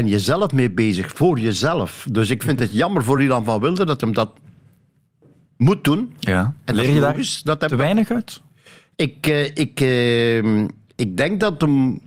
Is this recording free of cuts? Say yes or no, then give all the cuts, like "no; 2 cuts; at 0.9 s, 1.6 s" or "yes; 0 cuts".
yes; 0 cuts